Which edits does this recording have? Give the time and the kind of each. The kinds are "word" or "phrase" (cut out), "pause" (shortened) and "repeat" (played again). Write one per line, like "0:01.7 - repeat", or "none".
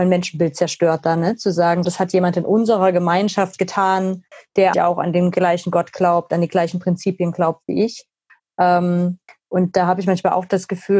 0:01.8 - word
0:04.7 - word